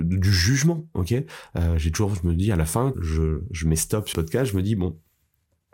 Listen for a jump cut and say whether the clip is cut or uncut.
cut